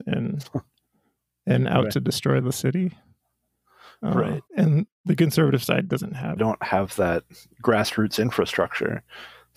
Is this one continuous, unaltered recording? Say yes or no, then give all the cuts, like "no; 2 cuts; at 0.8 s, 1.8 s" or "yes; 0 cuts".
no; 2 cuts; at 4.5 s, 6.4 s